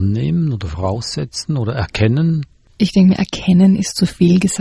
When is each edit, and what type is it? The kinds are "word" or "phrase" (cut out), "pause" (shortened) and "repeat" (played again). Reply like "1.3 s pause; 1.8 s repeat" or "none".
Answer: none